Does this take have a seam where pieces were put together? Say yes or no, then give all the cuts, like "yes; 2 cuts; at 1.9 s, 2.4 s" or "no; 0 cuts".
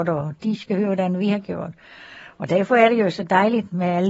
no; 0 cuts